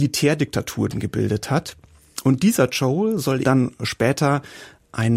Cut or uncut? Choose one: cut